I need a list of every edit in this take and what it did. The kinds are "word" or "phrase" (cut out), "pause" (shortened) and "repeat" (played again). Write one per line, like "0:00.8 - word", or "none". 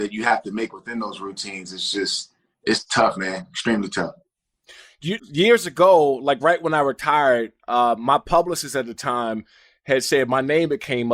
0:05.2 - word